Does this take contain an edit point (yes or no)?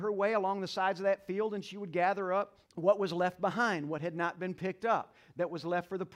yes